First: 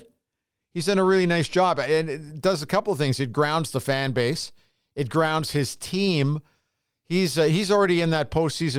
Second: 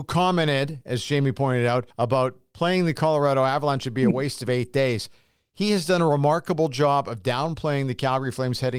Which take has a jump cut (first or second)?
second